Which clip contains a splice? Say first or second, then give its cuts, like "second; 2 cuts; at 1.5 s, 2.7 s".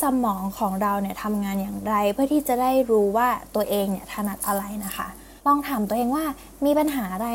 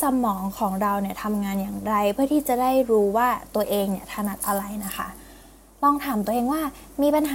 first; 1 cut; at 5.4 s